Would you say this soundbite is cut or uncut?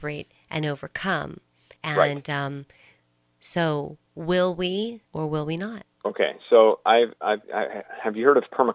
cut